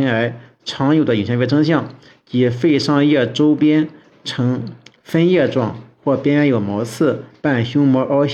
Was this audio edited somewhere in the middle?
no; 0 cuts

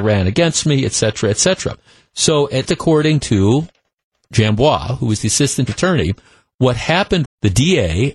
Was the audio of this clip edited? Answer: yes; 3 cuts; at 2.7 s, 5.7 s, 7.2 s

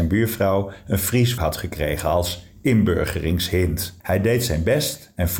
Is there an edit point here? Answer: yes; 2 cuts; at 1.4 s, 4.0 s

